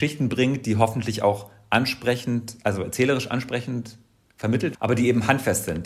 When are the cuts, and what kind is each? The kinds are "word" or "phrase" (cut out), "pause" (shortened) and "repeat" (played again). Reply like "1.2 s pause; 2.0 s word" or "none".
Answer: 4.7 s word